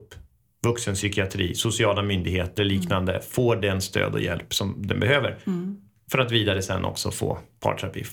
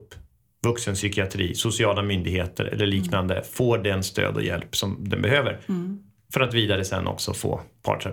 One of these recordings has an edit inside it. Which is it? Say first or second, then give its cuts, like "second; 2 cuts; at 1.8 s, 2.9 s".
first; 1 cut; at 2.6 s